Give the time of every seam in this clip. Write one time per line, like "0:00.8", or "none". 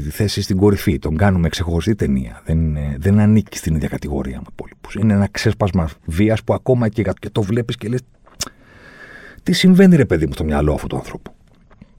0:04.5
0:07.2